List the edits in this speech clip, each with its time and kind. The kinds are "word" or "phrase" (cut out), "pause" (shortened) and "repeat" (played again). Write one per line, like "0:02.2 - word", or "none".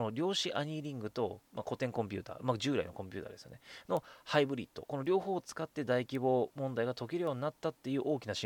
0:01.5 - pause